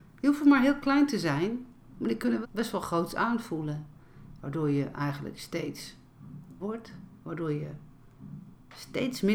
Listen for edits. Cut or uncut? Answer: cut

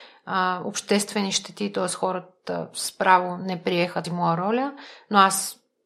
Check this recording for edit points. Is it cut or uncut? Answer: cut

